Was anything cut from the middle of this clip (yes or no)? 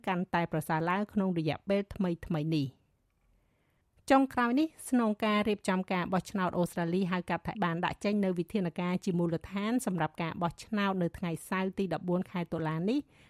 yes